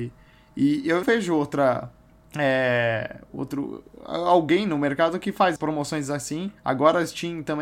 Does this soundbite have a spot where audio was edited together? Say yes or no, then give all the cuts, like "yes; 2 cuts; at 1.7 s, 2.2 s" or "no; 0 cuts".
yes; 3 cuts; at 1.0 s, 5.6 s, 6.6 s